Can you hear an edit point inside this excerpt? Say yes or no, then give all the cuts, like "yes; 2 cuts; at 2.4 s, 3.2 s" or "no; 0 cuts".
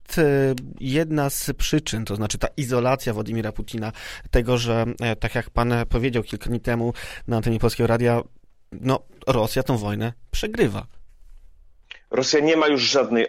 no; 0 cuts